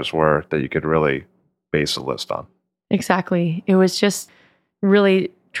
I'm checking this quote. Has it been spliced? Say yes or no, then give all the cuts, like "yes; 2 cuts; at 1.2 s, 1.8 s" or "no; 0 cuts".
no; 0 cuts